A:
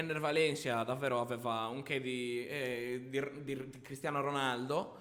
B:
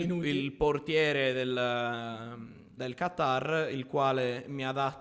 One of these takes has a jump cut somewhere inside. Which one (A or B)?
B